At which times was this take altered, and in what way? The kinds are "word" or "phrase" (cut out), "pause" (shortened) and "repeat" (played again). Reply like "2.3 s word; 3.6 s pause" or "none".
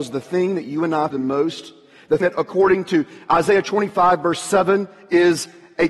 1.1 s word; 2.2 s word